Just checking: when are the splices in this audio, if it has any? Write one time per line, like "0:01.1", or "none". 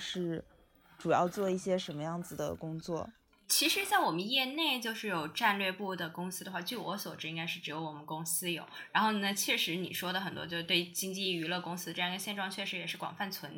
none